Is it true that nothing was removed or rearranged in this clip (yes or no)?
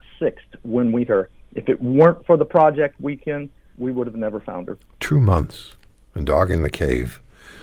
no